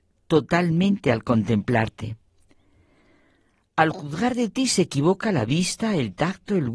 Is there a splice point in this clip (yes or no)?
no